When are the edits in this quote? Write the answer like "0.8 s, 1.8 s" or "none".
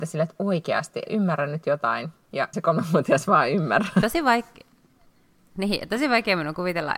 1.1 s, 2.5 s